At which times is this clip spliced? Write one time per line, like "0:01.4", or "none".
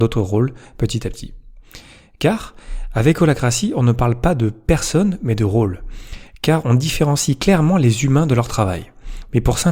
none